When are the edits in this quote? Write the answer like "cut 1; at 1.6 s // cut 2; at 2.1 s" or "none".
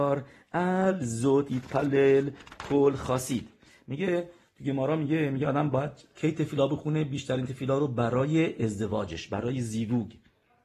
none